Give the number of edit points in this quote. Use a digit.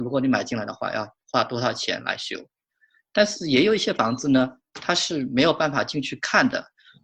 0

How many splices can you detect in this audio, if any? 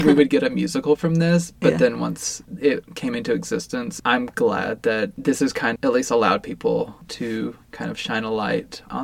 1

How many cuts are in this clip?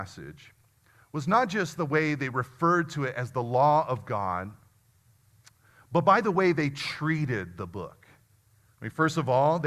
0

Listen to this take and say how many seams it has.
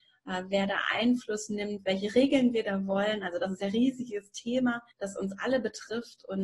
1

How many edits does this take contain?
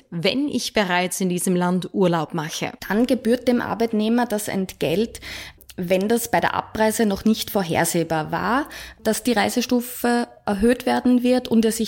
1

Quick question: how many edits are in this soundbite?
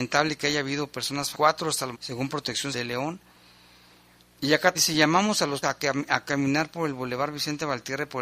5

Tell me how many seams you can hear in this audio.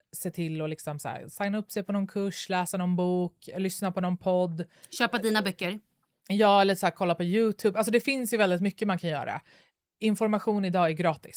0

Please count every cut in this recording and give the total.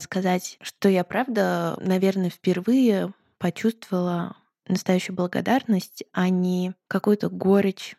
0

